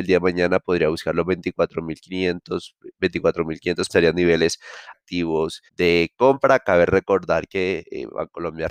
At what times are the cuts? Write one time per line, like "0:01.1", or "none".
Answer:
0:03.9
0:04.9
0:05.7